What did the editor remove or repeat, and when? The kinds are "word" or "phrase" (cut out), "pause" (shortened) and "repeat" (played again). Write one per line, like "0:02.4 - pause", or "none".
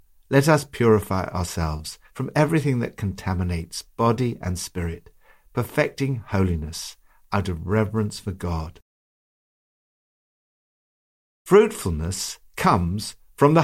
none